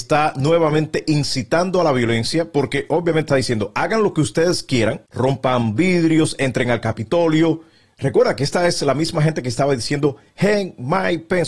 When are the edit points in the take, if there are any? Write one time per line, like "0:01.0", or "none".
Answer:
0:03.3